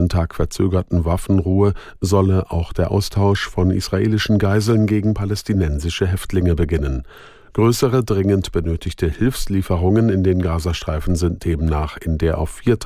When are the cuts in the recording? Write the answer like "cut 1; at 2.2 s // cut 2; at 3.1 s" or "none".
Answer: none